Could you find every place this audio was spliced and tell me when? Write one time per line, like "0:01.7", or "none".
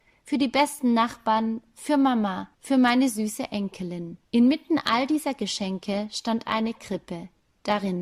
0:02.5
0:04.2

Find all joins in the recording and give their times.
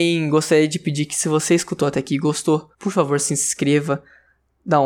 0:02.7

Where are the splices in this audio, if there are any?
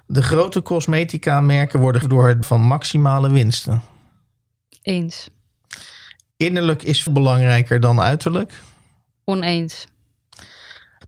0:02.0
0:02.4
0:07.1

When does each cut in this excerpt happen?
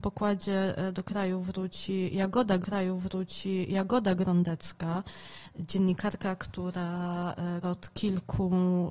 0:02.6
0:07.6

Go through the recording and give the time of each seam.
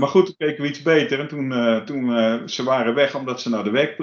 none

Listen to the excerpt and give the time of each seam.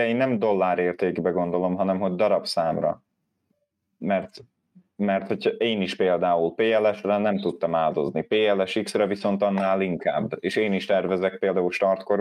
none

